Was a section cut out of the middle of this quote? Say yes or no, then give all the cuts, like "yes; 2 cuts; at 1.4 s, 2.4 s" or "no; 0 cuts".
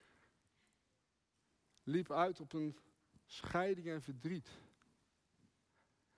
no; 0 cuts